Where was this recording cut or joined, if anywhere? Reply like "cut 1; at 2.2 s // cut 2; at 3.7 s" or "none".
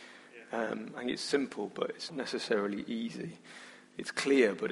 cut 1; at 2.1 s